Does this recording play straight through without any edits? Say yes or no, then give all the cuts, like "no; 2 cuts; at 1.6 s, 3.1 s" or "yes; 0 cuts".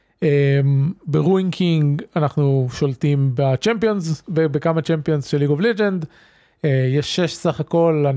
yes; 0 cuts